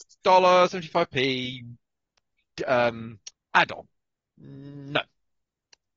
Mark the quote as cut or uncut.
cut